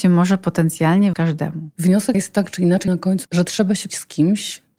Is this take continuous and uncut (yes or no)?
no